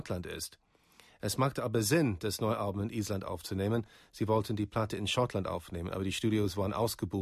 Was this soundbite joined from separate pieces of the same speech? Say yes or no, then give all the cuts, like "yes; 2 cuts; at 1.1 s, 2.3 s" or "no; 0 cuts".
no; 0 cuts